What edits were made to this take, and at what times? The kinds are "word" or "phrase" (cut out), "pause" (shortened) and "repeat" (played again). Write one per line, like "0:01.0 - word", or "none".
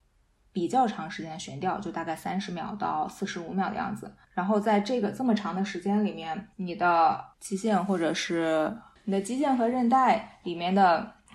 0:04.2 - pause
0:06.5 - pause
0:07.3 - pause